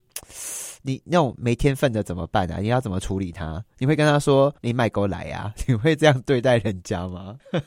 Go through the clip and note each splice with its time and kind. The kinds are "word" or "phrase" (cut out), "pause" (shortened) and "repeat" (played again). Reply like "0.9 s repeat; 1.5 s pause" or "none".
4.6 s pause